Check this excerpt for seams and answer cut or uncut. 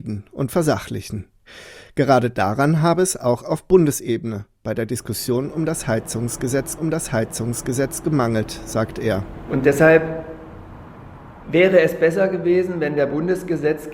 cut